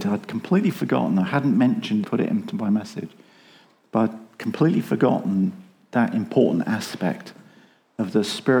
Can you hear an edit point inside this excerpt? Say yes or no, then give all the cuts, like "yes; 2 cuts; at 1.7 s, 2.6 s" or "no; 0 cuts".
yes; 1 cut; at 2.0 s